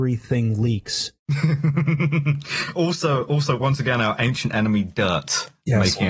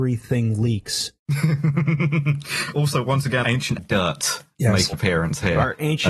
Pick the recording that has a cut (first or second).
second